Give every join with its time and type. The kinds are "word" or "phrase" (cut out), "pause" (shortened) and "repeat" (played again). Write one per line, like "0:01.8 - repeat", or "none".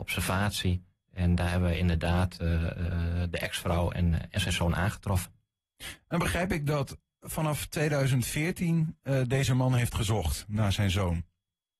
0:04.1 - word